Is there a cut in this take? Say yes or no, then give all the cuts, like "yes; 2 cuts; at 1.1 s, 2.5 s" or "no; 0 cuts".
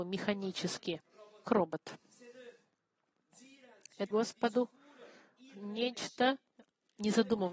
yes; 2 cuts; at 1.4 s, 4.1 s